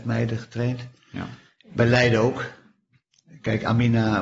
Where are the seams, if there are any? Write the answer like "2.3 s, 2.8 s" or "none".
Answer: 1.5 s